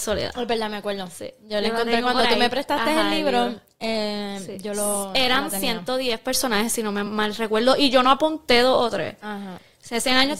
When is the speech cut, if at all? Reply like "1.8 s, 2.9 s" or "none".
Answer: none